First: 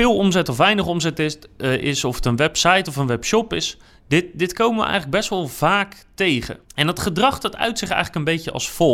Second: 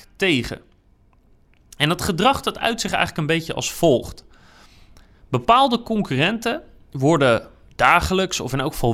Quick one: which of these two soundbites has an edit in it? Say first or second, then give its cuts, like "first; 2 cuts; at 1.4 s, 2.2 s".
first; 2 cuts; at 3.9 s, 6.6 s